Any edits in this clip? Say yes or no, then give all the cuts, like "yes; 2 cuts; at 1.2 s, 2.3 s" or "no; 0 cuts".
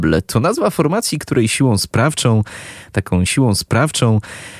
yes; 1 cut; at 3.3 s